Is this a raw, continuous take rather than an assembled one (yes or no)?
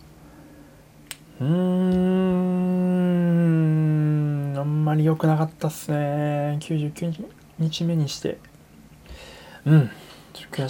yes